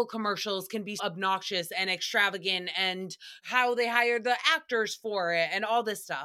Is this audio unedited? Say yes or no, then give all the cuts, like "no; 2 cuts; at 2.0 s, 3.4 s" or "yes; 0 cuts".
no; 2 cuts; at 1.0 s, 3.4 s